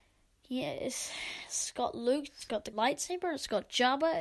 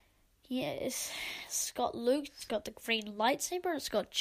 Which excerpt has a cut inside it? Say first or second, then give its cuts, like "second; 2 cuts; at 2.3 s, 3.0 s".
first; 1 cut; at 2.7 s